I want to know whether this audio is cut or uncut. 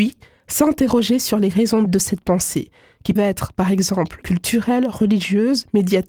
cut